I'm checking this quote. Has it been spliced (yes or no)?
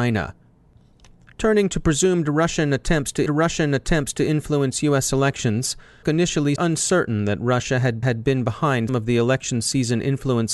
yes